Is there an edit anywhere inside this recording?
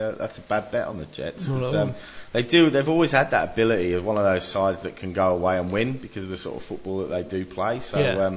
no; 0 cuts

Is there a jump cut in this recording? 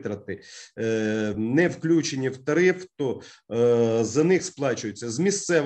no; 0 cuts

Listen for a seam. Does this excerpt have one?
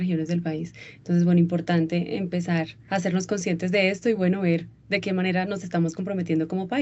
no; 0 cuts

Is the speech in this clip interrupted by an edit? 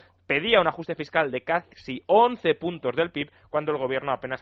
no; 0 cuts

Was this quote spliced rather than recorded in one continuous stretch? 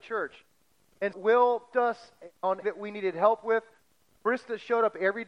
yes; 3 cuts; at 1.1 s, 1.7 s, 2.6 s

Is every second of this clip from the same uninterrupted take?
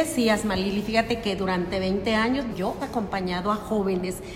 no; 2 cuts; at 2.5 s, 2.8 s

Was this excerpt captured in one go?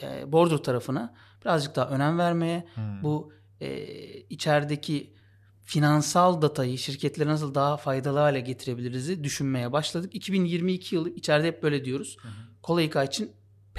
yes; 0 cuts

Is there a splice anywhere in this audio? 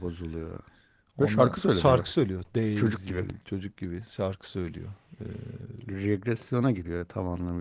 no; 0 cuts

